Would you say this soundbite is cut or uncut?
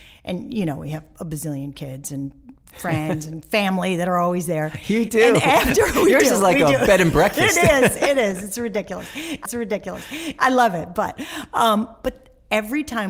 cut